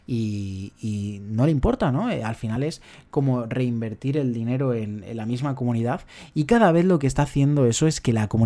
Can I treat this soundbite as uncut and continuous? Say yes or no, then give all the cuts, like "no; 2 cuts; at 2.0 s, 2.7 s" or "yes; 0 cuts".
yes; 0 cuts